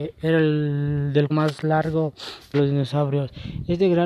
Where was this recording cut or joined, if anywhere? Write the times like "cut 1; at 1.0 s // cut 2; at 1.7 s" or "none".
cut 1; at 1.3 s // cut 2; at 2.5 s